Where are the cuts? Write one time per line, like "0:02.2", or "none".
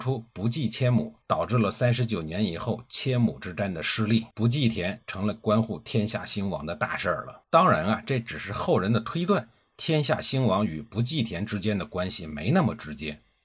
0:01.2
0:04.3
0:07.4